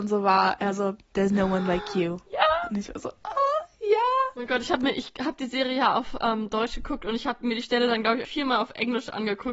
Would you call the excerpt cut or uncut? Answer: cut